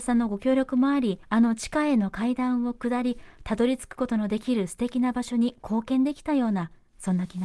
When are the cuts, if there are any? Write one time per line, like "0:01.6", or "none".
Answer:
0:01.2